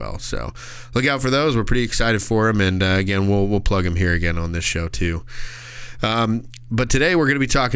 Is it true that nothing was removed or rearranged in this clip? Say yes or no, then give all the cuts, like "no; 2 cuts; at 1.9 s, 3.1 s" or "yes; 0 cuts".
yes; 0 cuts